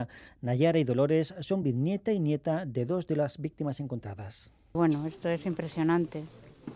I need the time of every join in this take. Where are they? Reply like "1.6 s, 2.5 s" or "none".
none

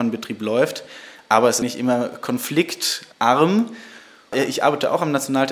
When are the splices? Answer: 1.6 s

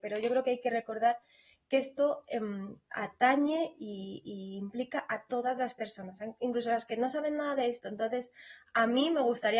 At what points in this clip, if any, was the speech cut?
none

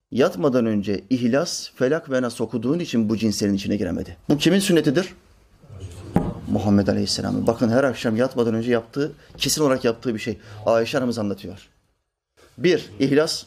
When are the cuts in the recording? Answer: 4.2 s

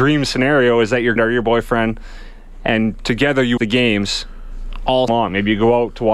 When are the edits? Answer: 1.2 s, 3.6 s, 5.1 s

